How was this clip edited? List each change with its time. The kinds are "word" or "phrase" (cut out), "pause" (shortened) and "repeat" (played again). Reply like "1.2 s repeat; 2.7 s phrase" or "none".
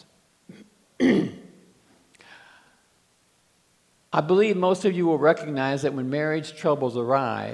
none